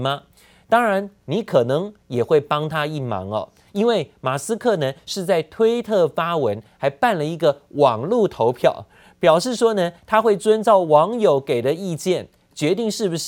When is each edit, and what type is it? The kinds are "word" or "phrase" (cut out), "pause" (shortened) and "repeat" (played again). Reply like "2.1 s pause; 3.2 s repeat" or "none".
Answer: none